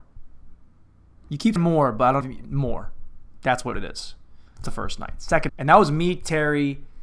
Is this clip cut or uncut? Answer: cut